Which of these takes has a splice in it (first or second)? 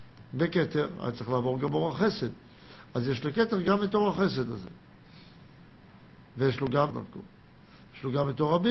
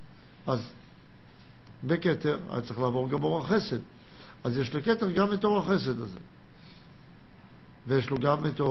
first